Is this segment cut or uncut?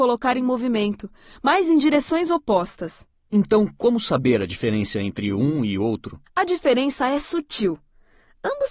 cut